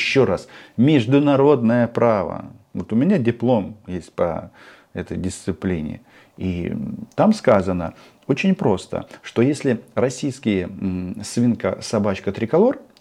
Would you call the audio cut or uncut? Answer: uncut